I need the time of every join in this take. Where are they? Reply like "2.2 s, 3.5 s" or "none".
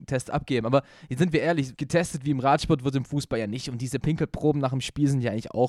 1.7 s, 4.0 s